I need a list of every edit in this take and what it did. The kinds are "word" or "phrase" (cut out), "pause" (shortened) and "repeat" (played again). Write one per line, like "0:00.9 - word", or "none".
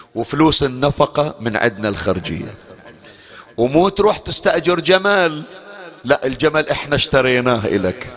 0:06.0 - pause